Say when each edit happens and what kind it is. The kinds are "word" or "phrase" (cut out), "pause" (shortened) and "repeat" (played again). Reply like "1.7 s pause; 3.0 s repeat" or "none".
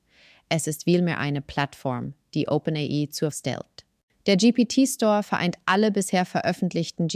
3.3 s word